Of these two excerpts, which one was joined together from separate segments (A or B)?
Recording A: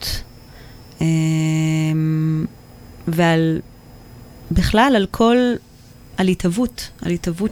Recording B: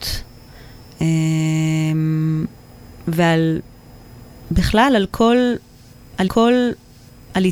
B